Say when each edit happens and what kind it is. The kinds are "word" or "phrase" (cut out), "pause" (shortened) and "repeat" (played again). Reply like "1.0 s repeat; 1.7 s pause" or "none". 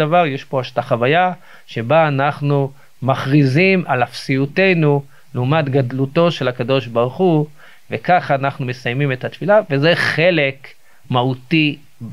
none